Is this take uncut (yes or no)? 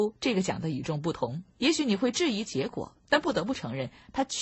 no